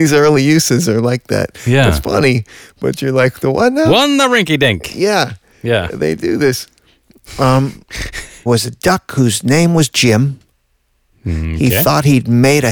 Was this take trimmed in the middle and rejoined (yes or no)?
yes